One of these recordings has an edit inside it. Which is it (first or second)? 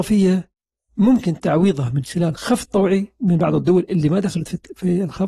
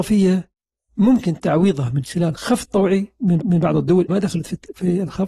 second